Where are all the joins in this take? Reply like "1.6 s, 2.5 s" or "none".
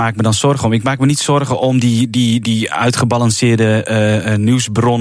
none

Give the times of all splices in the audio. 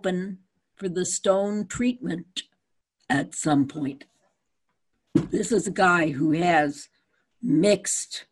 none

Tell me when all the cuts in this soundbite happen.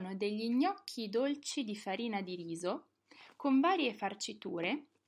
none

